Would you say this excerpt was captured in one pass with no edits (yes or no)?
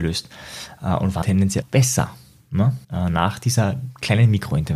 no